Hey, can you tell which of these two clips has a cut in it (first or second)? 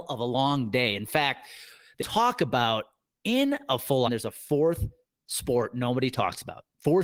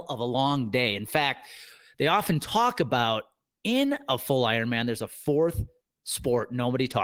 first